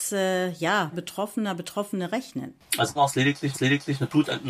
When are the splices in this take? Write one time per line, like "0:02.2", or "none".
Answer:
0:00.9
0:03.0
0:03.5